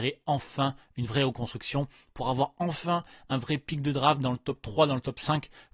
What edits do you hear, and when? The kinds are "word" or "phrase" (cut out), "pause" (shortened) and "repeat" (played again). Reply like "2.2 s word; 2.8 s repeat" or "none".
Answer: none